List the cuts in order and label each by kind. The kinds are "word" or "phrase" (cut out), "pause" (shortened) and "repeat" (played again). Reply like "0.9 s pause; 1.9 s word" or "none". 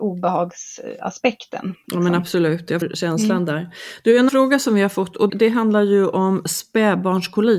2.8 s word; 4.3 s word; 5.3 s word